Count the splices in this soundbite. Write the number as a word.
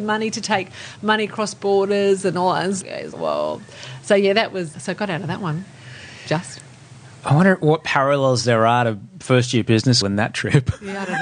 four